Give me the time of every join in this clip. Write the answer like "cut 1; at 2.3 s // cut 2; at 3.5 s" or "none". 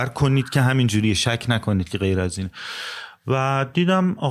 none

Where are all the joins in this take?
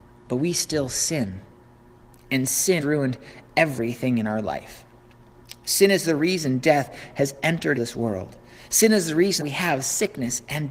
cut 1; at 2.8 s // cut 2; at 7.8 s // cut 3; at 9.4 s

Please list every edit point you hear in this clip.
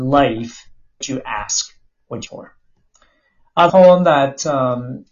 cut 1; at 1.0 s // cut 2; at 2.3 s // cut 3; at 3.7 s

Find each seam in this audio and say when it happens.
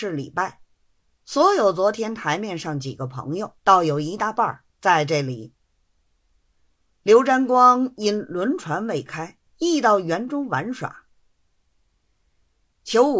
cut 1; at 3.6 s // cut 2; at 9.5 s

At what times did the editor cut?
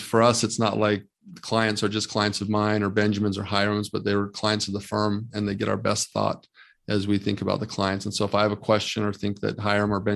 none

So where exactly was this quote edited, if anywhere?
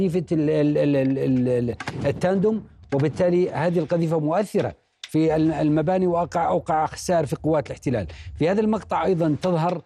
none

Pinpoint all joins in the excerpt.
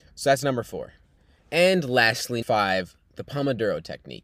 cut 1; at 2.4 s

